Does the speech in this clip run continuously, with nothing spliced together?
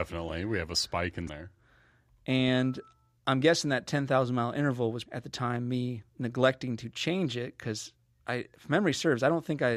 no; 3 cuts; at 1.3 s, 5.0 s, 6.1 s

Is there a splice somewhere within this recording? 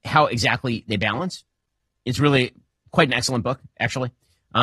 no; 0 cuts

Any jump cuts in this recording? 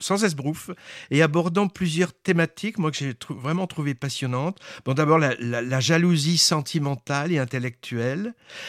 no; 0 cuts

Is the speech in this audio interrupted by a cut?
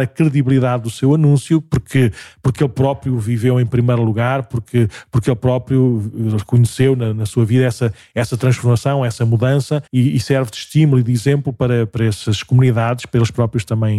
yes; 1 cut; at 9.9 s

